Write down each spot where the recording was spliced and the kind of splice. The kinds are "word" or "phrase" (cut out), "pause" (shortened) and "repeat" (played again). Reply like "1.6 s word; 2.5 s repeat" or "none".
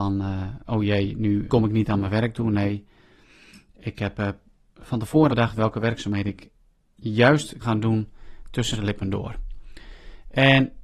1.5 s word; 5.3 s word; 7.6 s word; 8.7 s word